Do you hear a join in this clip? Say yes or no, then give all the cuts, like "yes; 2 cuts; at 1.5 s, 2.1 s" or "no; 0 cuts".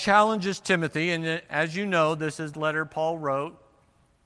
yes; 1 cut; at 2.5 s